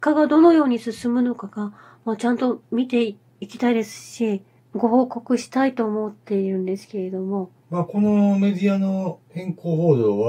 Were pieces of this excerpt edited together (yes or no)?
no